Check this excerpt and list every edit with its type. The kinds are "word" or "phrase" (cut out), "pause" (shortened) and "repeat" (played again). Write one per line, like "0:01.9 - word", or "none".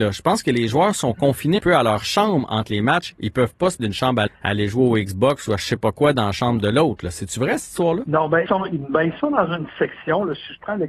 0:01.6 - word
0:03.8 - word
0:04.3 - word
0:08.5 - word